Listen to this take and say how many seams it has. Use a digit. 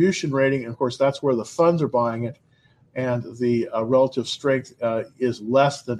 0